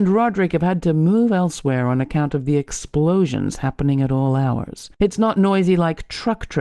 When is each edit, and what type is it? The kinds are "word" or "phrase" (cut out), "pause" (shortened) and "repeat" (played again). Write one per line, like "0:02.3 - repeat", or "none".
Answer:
none